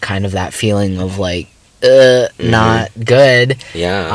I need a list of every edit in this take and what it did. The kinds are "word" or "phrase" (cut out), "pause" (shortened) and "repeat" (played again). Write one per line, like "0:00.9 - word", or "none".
none